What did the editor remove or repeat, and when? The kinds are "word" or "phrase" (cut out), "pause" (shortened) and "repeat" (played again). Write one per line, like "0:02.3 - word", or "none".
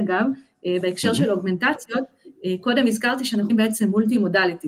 0:03.5 - word

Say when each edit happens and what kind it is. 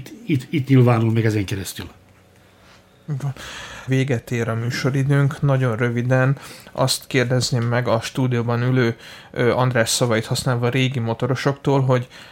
0:03.9 - word

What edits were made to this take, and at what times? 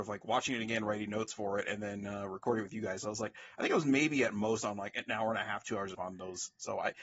0:05.9 - phrase

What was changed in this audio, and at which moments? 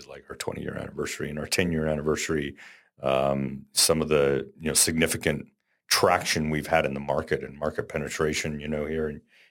none

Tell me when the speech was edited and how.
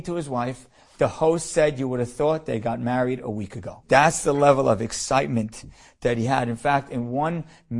none

